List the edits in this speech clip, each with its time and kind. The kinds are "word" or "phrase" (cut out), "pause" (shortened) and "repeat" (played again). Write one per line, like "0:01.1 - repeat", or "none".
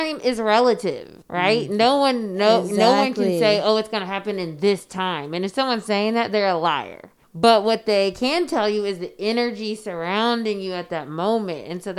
0:01.2 - pause
0:07.2 - pause